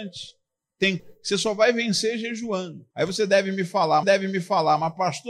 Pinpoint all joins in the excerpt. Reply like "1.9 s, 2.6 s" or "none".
1.0 s, 2.9 s, 4.0 s